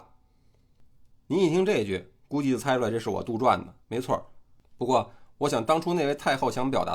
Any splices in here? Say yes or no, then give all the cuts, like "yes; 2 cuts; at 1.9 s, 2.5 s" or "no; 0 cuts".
yes; 1 cut; at 3.8 s